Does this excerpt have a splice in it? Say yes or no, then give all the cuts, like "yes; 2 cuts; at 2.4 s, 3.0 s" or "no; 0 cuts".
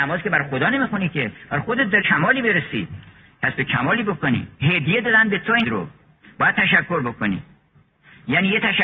yes; 3 cuts; at 2.0 s, 4.5 s, 5.6 s